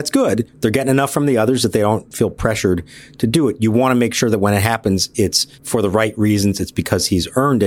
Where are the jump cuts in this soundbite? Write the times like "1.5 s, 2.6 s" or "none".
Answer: 5.5 s